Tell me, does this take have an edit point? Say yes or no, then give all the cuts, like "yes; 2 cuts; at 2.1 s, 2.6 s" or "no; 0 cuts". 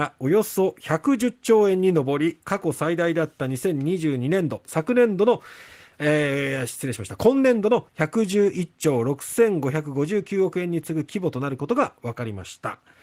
no; 0 cuts